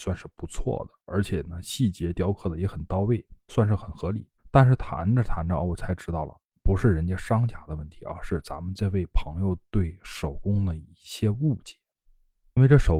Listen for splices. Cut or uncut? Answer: cut